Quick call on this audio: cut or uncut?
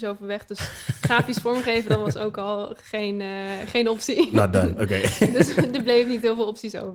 uncut